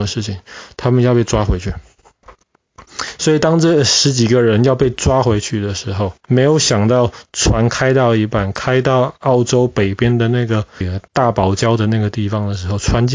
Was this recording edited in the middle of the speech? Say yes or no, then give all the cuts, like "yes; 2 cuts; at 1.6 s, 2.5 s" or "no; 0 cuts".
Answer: yes; 1 cut; at 6.2 s